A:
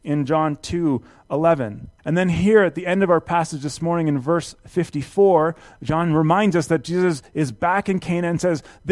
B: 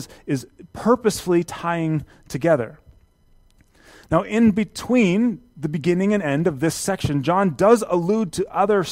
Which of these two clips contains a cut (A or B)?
A